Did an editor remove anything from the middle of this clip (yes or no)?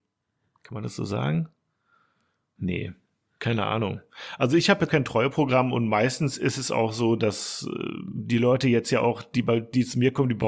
yes